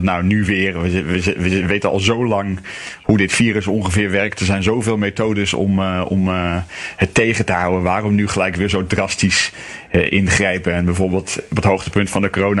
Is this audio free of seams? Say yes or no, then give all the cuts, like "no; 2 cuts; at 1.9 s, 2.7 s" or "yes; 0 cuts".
yes; 0 cuts